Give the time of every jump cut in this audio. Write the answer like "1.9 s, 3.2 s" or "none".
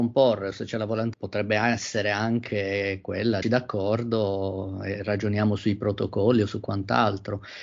1.1 s, 3.4 s